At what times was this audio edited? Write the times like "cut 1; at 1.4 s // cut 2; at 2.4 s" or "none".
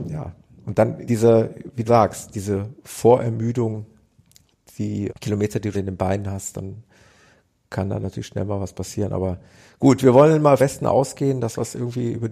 cut 1; at 1.1 s // cut 2; at 1.9 s // cut 3; at 5.1 s // cut 4; at 5.7 s // cut 5; at 10.6 s